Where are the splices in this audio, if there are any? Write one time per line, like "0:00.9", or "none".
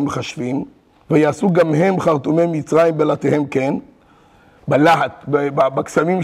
none